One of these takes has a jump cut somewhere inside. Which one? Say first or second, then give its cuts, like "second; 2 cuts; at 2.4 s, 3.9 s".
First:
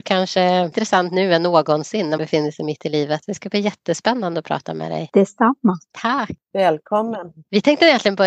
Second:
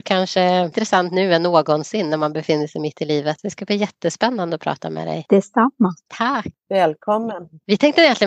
first; 1 cut; at 2.2 s